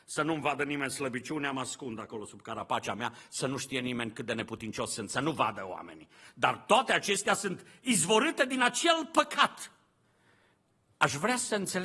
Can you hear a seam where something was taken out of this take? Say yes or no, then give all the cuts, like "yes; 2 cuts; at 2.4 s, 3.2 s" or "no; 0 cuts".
no; 0 cuts